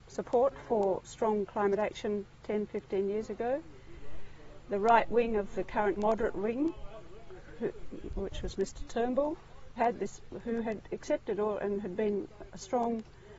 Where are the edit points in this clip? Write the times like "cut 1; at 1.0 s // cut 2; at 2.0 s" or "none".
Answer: cut 1; at 2.3 s // cut 2; at 6.0 s // cut 3; at 9.8 s